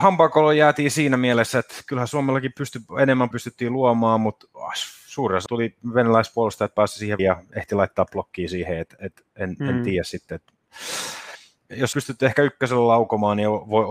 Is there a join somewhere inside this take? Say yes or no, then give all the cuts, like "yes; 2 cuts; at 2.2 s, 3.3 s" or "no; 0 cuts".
yes; 4 cuts; at 3.3 s, 5.5 s, 7.2 s, 11.9 s